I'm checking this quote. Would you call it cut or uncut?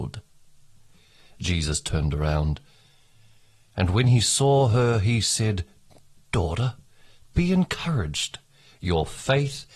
uncut